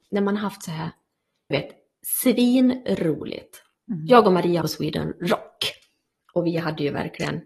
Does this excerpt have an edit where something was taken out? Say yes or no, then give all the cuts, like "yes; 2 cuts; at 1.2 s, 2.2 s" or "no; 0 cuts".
yes; 2 cuts; at 1.5 s, 4.6 s